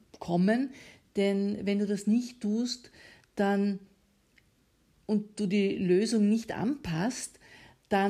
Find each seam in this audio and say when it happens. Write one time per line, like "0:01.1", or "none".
none